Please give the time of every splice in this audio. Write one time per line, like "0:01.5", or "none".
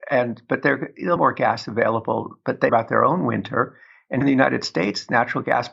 0:01.2
0:02.7
0:04.2